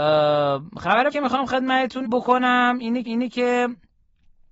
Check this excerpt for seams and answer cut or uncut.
cut